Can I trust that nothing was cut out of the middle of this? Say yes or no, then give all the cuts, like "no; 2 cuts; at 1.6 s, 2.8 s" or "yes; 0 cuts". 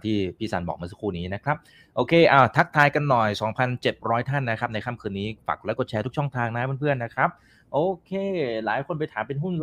yes; 0 cuts